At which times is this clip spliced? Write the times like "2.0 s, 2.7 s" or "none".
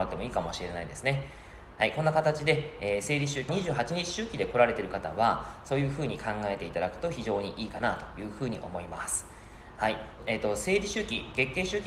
3.5 s, 10.2 s